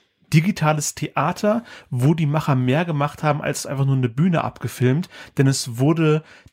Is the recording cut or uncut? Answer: uncut